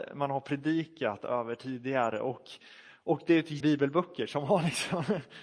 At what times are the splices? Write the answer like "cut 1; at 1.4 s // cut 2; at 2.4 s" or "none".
cut 1; at 3.6 s